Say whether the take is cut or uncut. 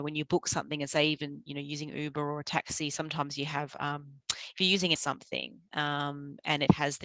cut